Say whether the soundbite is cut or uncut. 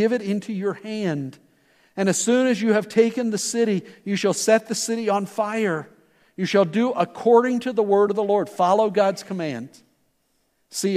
uncut